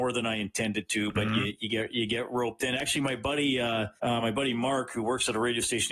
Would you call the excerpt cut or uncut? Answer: cut